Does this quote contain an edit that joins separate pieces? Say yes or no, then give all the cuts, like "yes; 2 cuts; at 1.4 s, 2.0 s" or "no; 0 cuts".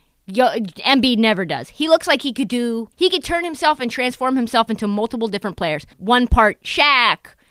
yes; 2 cuts; at 2.9 s, 5.9 s